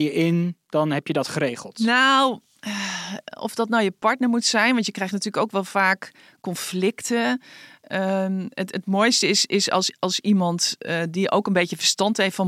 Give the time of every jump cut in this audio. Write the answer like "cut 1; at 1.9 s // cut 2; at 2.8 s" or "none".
none